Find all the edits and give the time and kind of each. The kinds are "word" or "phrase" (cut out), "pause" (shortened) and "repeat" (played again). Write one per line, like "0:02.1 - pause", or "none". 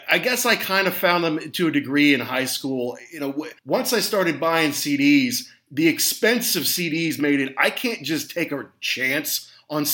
0:03.6 - pause